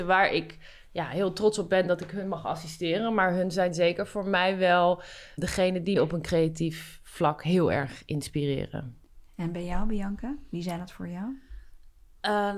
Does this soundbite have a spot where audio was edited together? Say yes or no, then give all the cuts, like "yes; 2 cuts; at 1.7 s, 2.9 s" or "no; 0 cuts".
yes; 2 cuts; at 5.4 s, 6.0 s